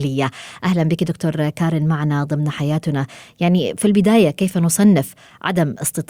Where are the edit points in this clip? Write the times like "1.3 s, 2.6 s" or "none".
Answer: none